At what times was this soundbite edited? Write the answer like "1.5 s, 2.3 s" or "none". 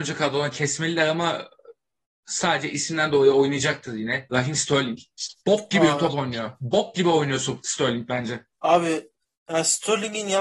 5.4 s, 8.5 s